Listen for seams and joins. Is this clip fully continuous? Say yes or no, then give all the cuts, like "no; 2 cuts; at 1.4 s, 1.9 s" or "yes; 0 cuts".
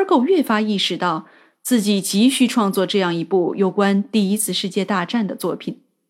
yes; 0 cuts